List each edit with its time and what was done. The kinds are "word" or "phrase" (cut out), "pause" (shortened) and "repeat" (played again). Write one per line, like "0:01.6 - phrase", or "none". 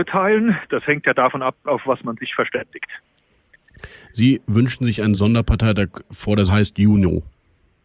0:06.5 - word